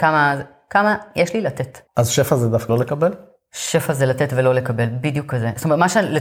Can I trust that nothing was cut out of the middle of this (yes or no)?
no